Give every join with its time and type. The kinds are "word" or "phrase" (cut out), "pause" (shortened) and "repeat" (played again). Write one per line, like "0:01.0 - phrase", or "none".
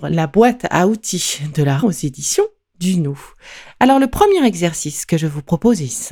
0:01.8 - word